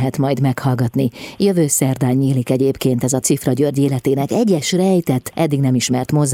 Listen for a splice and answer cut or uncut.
cut